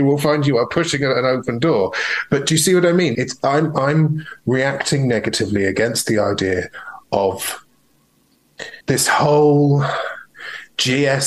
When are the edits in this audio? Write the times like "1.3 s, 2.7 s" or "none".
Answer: 3.1 s, 8.8 s